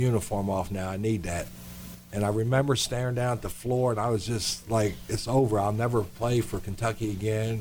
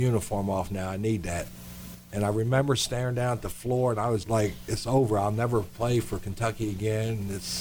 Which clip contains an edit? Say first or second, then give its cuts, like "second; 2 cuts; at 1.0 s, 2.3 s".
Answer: second; 1 cut; at 4.2 s